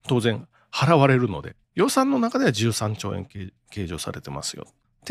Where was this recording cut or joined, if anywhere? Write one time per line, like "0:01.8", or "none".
0:01.6